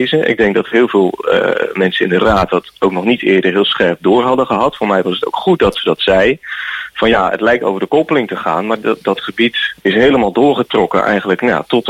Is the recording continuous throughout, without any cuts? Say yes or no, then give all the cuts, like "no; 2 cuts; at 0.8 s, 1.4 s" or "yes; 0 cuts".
yes; 0 cuts